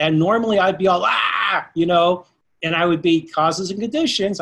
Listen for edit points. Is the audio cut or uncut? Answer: uncut